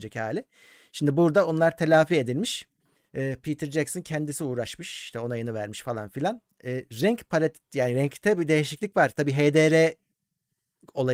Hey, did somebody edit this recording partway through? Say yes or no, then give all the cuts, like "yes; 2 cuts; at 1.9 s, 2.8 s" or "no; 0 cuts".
yes; 1 cut; at 3.0 s